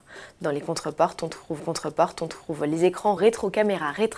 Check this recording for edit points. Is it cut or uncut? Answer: cut